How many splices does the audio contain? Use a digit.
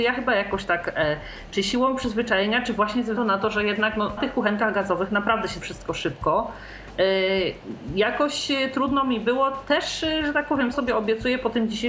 4